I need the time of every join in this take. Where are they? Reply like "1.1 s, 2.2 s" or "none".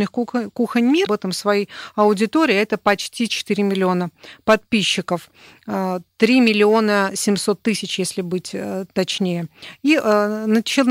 1.1 s

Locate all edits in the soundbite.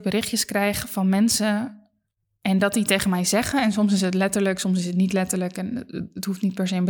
none

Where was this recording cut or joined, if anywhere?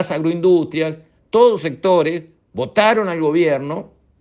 1.6 s

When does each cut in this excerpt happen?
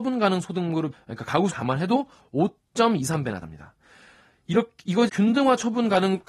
0.9 s, 1.5 s, 3.4 s, 5.1 s

